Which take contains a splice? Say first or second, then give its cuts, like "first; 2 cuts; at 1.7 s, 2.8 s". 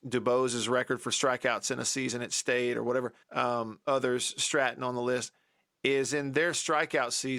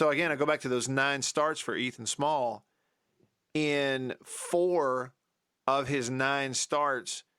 first; 1 cut; at 3.2 s